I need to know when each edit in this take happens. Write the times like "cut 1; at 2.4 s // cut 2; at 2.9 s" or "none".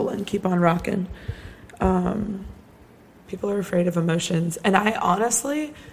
cut 1; at 3.2 s